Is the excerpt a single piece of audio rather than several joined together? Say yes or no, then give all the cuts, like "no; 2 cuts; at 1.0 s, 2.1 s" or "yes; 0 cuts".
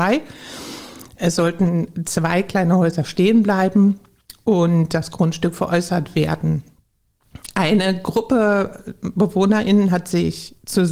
yes; 0 cuts